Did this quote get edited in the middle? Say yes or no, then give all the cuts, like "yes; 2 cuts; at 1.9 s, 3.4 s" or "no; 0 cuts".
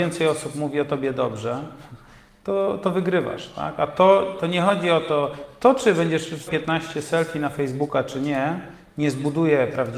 yes; 1 cut; at 6.5 s